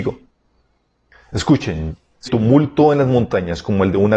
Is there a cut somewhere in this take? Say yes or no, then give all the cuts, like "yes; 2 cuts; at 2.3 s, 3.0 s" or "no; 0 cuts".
yes; 1 cut; at 2.3 s